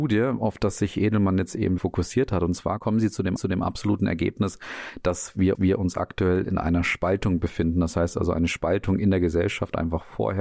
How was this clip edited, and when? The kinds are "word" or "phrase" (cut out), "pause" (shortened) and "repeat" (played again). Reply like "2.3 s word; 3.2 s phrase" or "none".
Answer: 1.8 s word; 3.4 s repeat; 5.5 s repeat